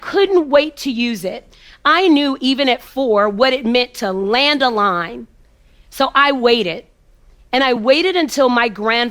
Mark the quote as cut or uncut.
uncut